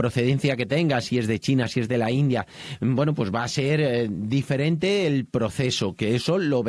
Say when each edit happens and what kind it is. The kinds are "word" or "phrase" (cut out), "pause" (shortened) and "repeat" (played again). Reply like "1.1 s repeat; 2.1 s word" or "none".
none